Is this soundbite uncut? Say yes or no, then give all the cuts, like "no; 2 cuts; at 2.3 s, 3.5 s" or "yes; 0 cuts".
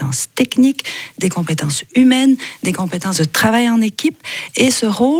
yes; 0 cuts